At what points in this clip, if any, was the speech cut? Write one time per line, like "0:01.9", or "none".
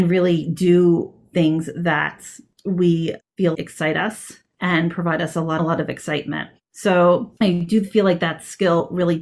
0:03.5
0:05.6
0:07.4